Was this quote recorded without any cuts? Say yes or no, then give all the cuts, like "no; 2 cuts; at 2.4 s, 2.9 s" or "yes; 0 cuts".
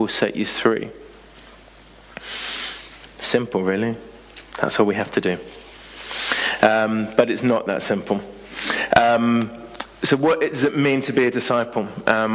no; 1 cut; at 4.5 s